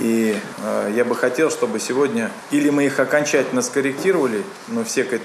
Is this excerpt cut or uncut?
uncut